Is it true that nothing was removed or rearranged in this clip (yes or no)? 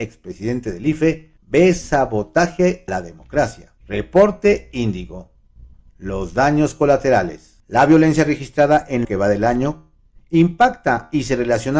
no